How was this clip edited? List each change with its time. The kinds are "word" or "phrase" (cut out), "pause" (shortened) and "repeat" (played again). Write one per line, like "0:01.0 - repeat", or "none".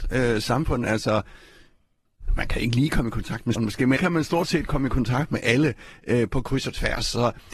0:03.6 - word
0:04.0 - word